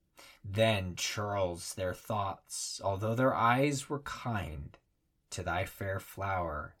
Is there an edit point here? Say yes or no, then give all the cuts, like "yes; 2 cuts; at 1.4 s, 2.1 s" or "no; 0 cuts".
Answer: no; 0 cuts